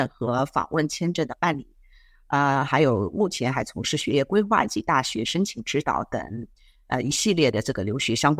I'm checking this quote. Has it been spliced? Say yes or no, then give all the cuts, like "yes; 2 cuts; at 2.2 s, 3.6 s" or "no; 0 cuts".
no; 0 cuts